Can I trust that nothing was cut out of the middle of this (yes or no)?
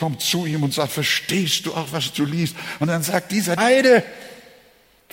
no